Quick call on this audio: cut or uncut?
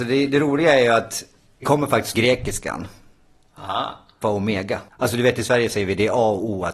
cut